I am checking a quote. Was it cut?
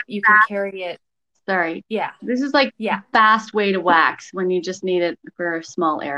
no; 0 cuts

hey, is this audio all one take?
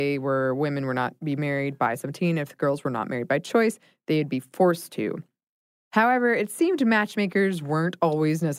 yes; 0 cuts

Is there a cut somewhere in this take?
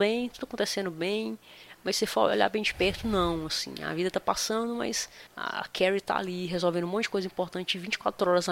yes; 1 cut; at 5.3 s

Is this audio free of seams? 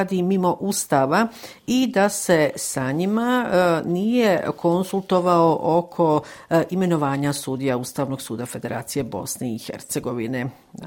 yes; 0 cuts

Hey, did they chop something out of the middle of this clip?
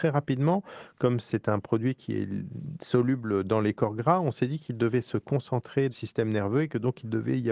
yes; 1 cut; at 5.9 s

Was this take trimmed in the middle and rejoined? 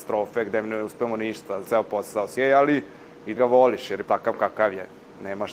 yes; 4 cuts; at 1.6 s, 2.4 s, 3.4 s, 4.0 s

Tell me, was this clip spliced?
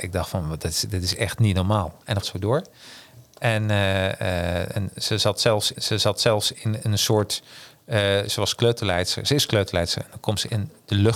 yes; 2 cuts; at 2.2 s, 5.7 s

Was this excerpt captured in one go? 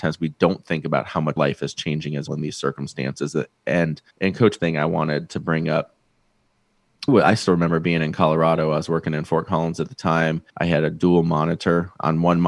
no; 6 cuts; at 1.4 s, 2.3 s, 4.1 s, 4.6 s, 7.1 s, 10.5 s

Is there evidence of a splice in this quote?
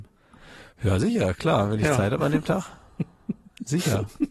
no; 0 cuts

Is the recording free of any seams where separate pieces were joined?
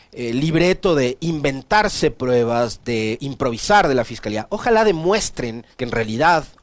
no; 1 cut; at 5.7 s

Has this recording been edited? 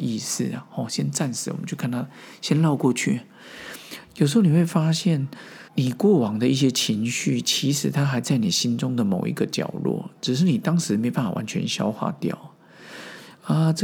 yes; 1 cut; at 5.7 s

